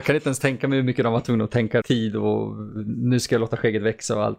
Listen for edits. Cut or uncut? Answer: cut